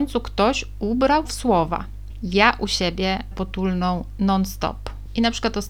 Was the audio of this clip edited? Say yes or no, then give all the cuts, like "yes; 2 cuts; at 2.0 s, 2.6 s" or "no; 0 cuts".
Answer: yes; 2 cuts; at 1.2 s, 3.3 s